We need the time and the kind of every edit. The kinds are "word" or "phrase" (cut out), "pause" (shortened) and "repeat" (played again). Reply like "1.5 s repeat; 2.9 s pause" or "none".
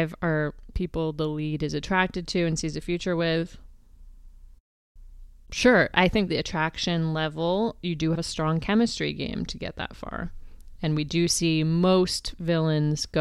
6.3 s word; 8.1 s phrase